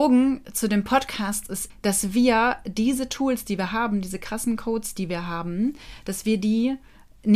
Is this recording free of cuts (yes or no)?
no